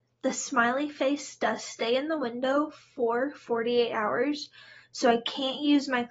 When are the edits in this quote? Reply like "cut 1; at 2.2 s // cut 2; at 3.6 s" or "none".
none